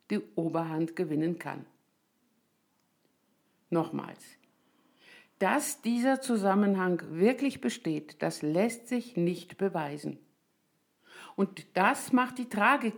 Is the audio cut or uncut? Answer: uncut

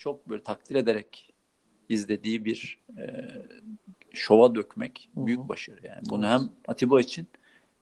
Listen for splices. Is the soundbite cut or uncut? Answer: uncut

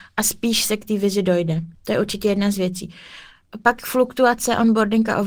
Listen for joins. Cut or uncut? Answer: cut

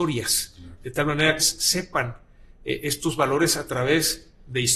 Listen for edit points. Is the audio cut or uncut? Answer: cut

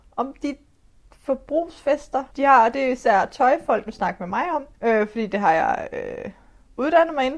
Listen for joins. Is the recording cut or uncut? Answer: cut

